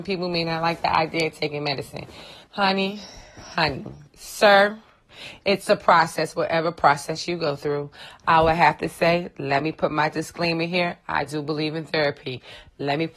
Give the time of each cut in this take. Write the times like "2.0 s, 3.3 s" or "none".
2.4 s, 4.1 s